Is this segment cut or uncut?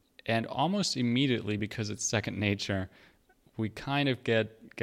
uncut